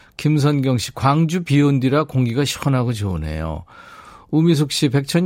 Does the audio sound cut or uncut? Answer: uncut